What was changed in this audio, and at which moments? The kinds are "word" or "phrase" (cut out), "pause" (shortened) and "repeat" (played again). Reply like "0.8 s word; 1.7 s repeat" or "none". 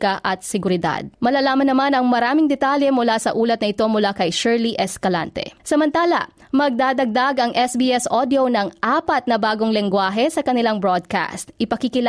1.1 s pause; 5.6 s pause

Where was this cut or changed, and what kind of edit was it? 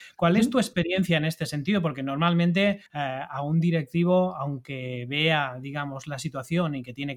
2.9 s pause

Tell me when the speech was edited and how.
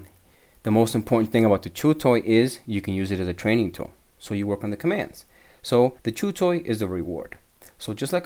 6.0 s pause

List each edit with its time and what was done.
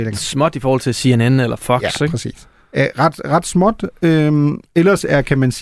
none

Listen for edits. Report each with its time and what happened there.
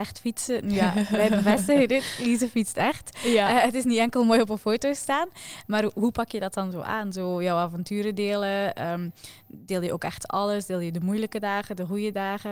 none

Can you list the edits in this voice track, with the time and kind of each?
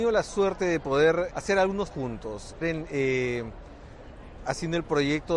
1.3 s word; 1.9 s word; 2.6 s word

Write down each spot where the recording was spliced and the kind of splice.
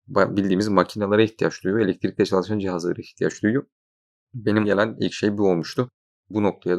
4.6 s word

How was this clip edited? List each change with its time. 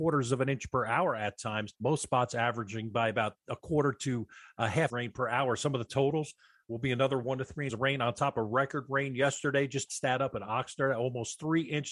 1.7 s pause; 4.9 s phrase; 7.7 s word; 9.9 s phrase

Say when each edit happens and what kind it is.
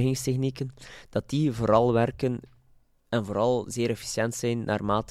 none

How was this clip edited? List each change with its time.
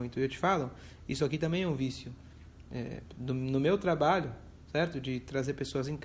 none

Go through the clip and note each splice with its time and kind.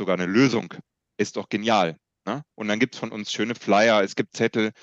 none

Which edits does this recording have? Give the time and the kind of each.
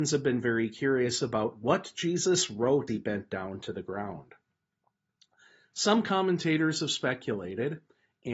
2.9 s word

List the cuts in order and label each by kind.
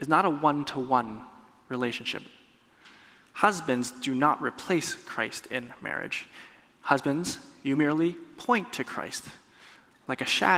none

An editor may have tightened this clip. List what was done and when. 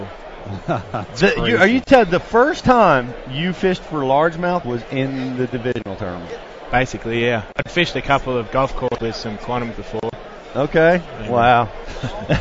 4.6 s word; 8.5 s word; 9.0 s word; 9.7 s word

